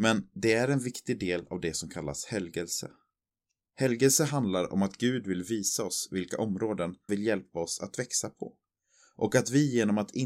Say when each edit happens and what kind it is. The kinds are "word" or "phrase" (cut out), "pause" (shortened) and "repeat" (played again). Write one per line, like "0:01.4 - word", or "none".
0:07.1 - word